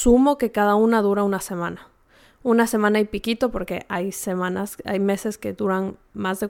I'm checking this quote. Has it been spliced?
no; 0 cuts

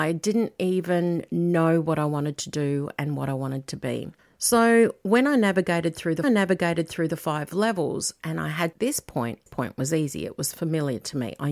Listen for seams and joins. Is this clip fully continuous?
no; 4 cuts; at 4.2 s, 6.2 s, 8.7 s, 9.5 s

